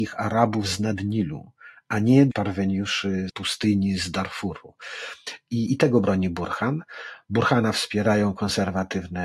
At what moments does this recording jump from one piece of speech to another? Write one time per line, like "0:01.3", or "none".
0:02.3
0:03.3
0:05.7